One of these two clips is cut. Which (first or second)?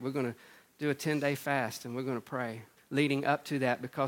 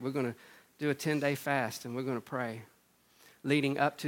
first